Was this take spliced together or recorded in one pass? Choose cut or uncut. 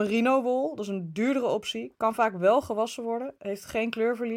uncut